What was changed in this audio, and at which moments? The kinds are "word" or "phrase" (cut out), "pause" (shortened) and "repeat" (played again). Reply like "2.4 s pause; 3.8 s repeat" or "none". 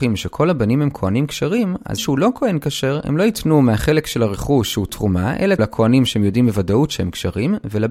2.0 s word; 5.6 s phrase